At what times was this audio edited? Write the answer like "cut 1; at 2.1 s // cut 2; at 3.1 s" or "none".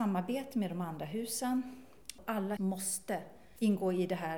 cut 1; at 2.6 s

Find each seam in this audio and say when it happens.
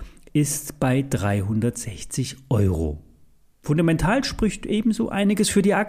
none

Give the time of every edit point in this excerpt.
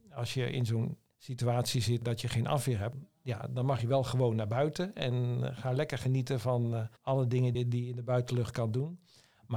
cut 1; at 7.0 s

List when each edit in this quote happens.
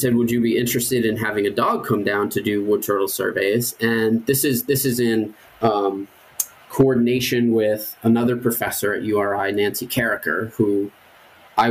cut 1; at 5.4 s

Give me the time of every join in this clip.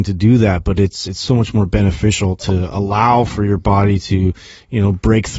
none

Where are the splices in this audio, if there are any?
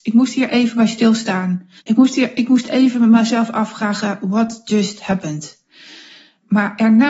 cut 1; at 1.8 s

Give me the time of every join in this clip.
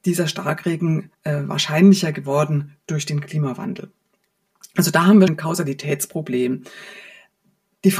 cut 1; at 1.1 s // cut 2; at 5.3 s

